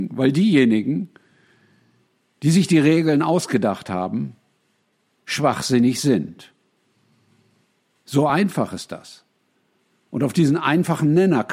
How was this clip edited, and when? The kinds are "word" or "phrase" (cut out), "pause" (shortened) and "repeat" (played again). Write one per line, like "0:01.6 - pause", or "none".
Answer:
none